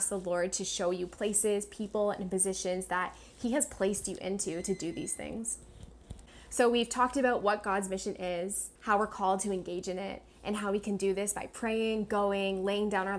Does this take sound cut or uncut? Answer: cut